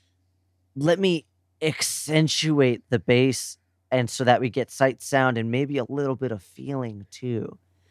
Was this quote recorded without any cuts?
yes; 0 cuts

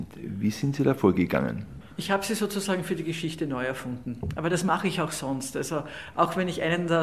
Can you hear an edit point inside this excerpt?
no; 0 cuts

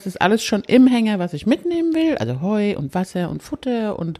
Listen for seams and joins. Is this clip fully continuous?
yes; 0 cuts

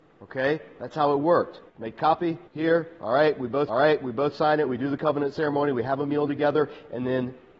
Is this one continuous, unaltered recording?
no; 3 cuts; at 1.7 s, 2.5 s, 3.7 s

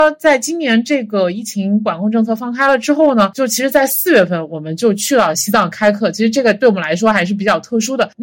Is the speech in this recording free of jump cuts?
yes; 0 cuts

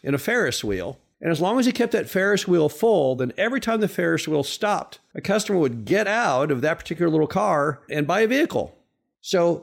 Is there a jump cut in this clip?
no; 0 cuts

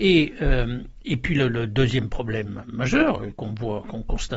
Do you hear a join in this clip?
no; 0 cuts

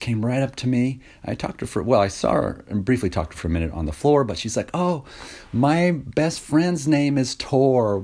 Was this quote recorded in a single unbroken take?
yes; 0 cuts

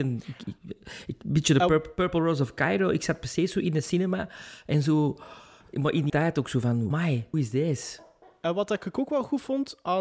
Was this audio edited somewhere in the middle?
yes; 3 cuts; at 6.1 s, 6.9 s, 7.3 s

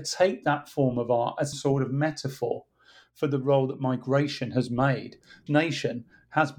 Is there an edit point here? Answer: yes; 2 cuts; at 1.5 s, 5.5 s

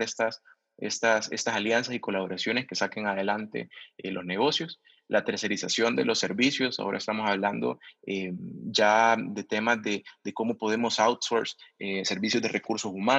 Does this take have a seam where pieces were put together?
no; 0 cuts

